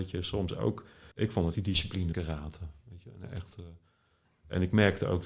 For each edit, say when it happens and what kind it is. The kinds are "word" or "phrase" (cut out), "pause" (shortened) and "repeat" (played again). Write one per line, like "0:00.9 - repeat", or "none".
0:01.1 - pause
0:01.5 - word
0:02.1 - word